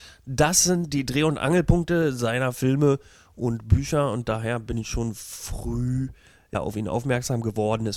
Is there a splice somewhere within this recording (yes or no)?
no